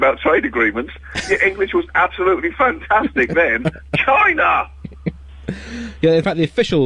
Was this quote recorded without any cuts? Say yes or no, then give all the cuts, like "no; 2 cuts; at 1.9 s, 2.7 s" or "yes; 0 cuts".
yes; 0 cuts